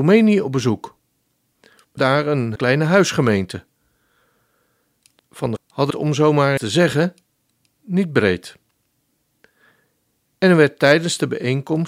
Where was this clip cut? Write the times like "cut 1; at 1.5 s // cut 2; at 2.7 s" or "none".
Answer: cut 1; at 2.0 s // cut 2; at 2.6 s // cut 3; at 5.2 s // cut 4; at 5.6 s // cut 5; at 5.9 s // cut 6; at 6.6 s